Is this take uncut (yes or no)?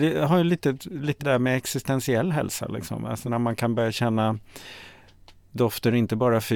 no